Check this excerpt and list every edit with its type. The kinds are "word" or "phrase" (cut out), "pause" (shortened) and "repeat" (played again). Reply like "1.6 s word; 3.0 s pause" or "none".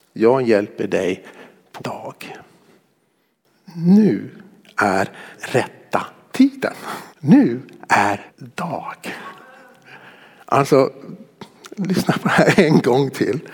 1.8 s word; 5.3 s word; 7.1 s pause; 8.3 s word

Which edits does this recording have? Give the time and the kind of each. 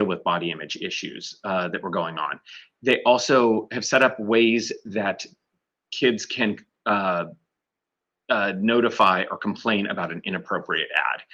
none

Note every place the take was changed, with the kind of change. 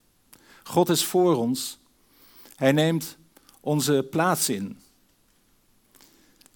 none

